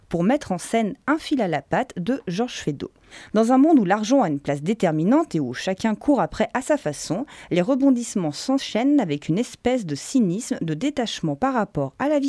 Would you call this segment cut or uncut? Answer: uncut